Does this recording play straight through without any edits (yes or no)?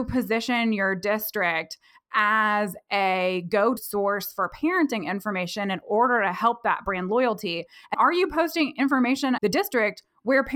no